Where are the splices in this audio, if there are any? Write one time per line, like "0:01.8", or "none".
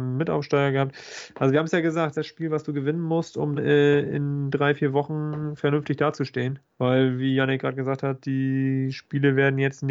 0:02.1
0:03.5